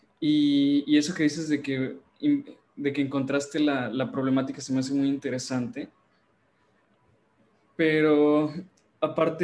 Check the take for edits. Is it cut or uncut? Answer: uncut